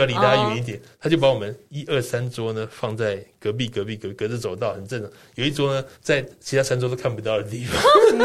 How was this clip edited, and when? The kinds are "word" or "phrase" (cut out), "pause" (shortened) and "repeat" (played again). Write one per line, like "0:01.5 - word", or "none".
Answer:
0:05.9 - pause